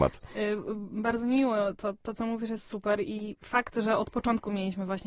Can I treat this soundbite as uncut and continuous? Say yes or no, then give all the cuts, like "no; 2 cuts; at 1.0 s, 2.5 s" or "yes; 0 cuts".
yes; 0 cuts